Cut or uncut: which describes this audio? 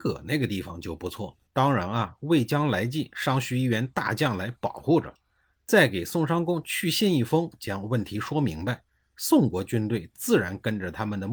cut